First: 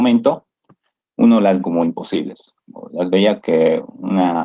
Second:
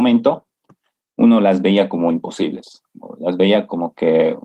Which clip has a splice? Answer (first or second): first